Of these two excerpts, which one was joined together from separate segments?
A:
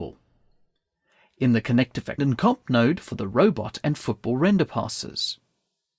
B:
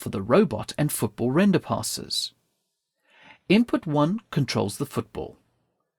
A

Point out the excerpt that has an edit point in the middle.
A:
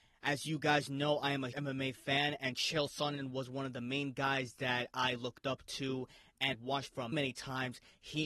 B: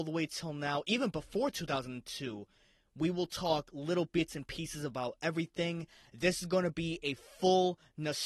A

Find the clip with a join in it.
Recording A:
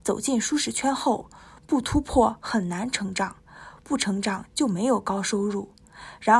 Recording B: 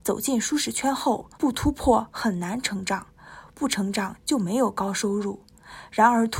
B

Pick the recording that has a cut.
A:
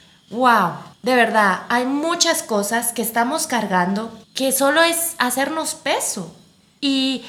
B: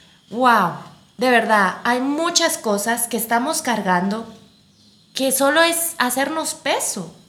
A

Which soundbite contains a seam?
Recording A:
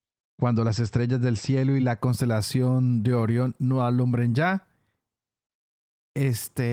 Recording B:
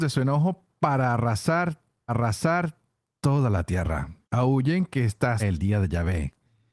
B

